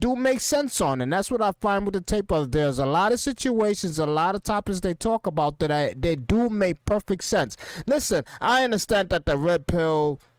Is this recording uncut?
yes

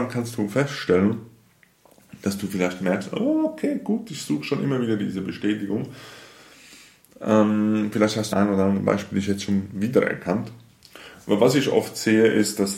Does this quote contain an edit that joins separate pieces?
yes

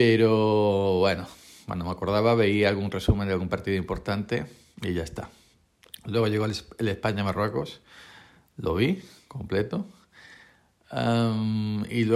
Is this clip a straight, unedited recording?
yes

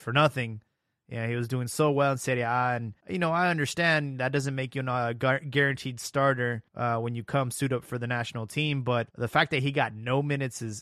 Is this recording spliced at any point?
yes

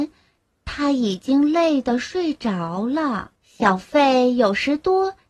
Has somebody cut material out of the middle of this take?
yes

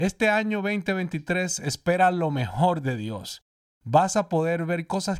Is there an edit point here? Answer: no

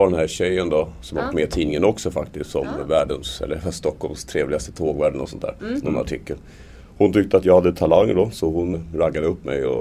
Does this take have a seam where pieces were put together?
yes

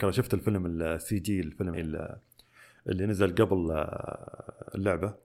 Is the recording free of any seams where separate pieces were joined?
no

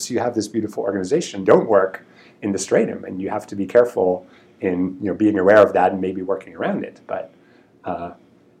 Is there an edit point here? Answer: yes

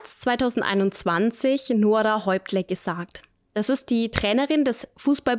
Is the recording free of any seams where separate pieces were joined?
yes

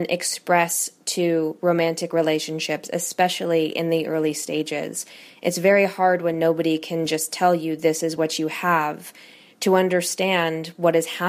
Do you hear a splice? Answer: no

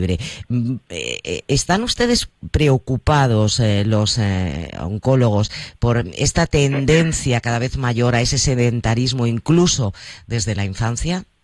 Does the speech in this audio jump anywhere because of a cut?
no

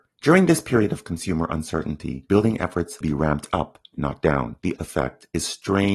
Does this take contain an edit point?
yes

